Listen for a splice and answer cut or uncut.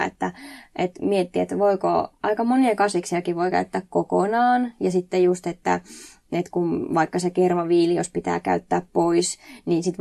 uncut